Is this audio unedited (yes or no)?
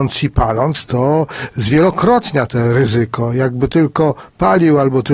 yes